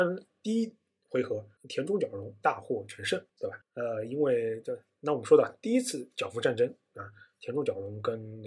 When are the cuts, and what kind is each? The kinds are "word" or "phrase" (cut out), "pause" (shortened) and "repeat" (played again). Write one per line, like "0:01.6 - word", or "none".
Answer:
0:01.6 - pause
0:03.3 - pause
0:03.6 - pause